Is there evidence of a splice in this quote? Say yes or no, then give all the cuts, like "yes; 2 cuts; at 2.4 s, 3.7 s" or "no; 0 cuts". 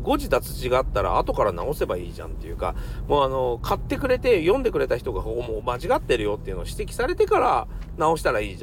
no; 0 cuts